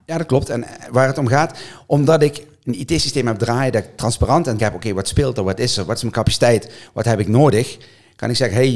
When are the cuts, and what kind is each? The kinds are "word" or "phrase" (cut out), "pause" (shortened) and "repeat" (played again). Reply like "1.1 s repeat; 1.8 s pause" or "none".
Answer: 4.6 s word